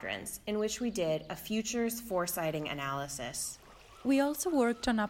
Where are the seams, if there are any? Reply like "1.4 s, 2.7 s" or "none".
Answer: none